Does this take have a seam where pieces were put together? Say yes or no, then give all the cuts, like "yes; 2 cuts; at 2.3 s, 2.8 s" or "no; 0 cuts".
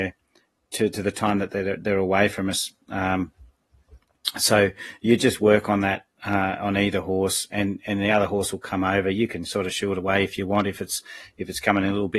no; 0 cuts